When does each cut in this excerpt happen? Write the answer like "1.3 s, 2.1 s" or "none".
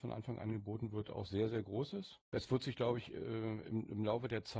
none

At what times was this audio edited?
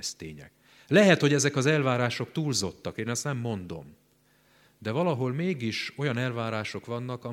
none

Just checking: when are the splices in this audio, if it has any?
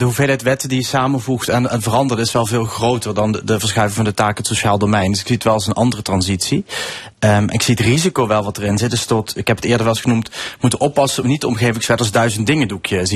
none

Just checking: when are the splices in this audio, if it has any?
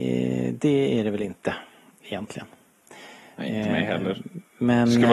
none

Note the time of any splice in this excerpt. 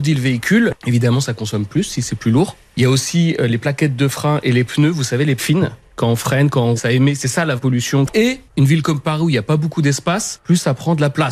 5.4 s, 6.8 s, 7.6 s

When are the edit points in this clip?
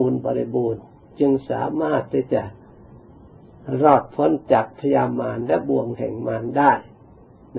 none

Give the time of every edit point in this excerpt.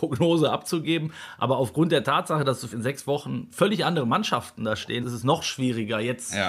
2.7 s, 5.0 s

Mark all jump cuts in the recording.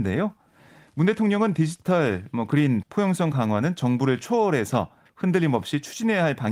2.8 s

